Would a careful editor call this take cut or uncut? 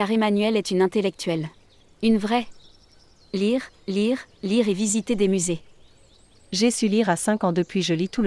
cut